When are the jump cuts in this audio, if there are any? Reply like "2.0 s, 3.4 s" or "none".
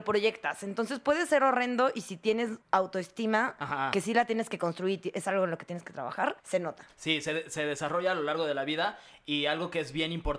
2.6 s, 6.4 s